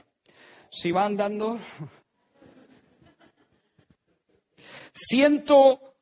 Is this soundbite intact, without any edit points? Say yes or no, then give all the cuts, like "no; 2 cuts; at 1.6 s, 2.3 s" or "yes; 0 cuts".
yes; 0 cuts